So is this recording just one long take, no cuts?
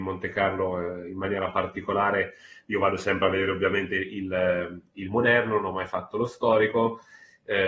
yes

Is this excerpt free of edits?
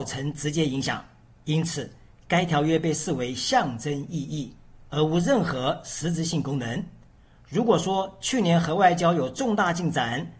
yes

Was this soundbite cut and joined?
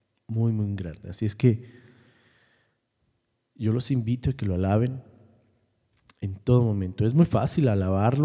no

